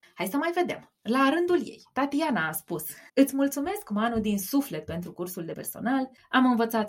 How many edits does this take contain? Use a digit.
2